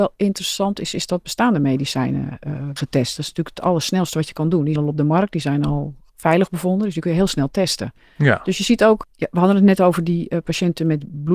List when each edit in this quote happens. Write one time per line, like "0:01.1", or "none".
0:02.8
0:04.8
0:09.0